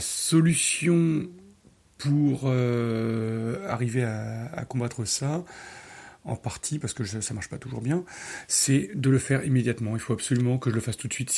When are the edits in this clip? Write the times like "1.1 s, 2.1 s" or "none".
none